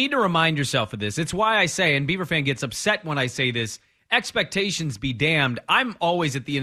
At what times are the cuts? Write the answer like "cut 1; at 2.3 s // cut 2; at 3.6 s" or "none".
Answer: none